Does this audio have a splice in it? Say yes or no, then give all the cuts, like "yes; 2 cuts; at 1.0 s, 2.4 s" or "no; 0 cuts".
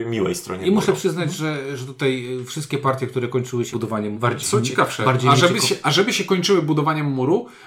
yes; 2 cuts; at 3.7 s, 4.1 s